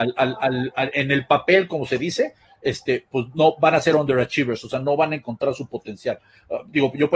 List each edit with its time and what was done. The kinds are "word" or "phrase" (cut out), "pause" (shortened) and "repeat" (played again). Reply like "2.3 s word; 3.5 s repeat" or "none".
none

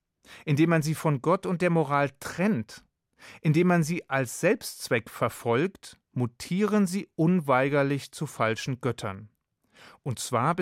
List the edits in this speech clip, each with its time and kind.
none

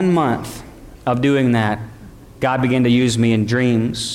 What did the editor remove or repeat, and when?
none

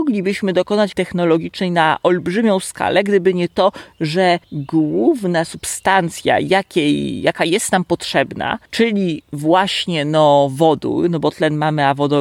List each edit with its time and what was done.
0.9 s word; 4.4 s pause; 8.7 s pause

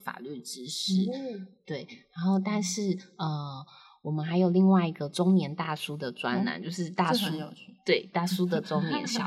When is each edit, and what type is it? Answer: none

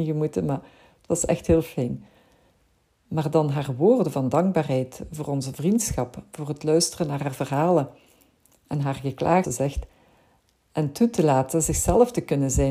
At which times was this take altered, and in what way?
9.4 s word

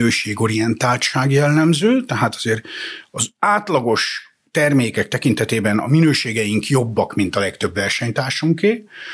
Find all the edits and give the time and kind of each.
none

